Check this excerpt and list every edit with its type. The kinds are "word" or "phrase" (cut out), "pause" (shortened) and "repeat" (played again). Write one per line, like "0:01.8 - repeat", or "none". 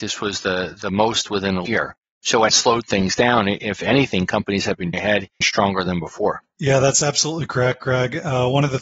0:01.7 - word
0:02.5 - word
0:04.9 - word
0:05.4 - word